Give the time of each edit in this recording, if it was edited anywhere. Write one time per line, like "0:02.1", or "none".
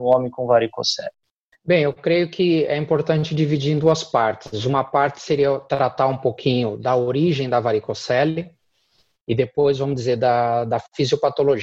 none